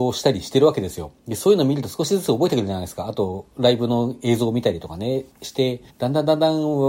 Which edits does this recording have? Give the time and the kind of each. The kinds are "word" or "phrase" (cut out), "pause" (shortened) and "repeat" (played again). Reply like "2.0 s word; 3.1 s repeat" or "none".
1.2 s pause; 5.3 s pause; 5.9 s pause